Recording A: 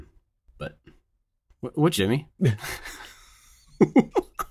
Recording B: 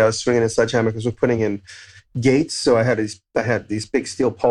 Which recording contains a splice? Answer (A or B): A